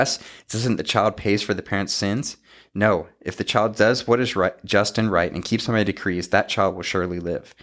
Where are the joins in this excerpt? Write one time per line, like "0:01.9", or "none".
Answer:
none

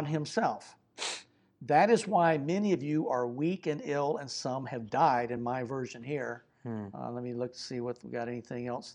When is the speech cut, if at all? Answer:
none

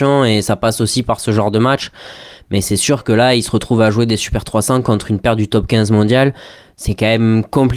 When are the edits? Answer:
none

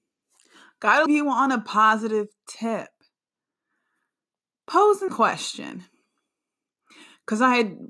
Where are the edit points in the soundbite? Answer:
0:01.1
0:05.1

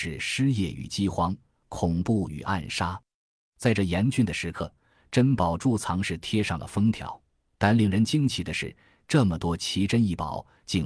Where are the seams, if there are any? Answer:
none

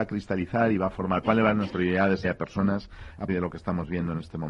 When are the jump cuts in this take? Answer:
0:01.2
0:01.7
0:02.2
0:03.3

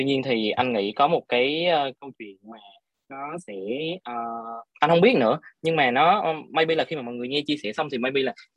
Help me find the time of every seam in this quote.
0:04.7

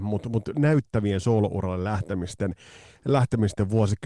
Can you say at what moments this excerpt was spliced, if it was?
none

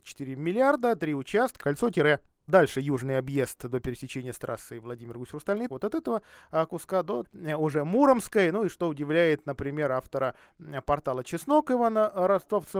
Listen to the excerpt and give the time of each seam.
0:01.6
0:02.5
0:05.7
0:07.2

